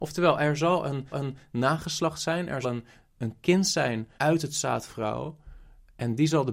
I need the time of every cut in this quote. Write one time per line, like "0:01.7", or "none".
0:01.1
0:02.6
0:03.2
0:04.2
0:04.9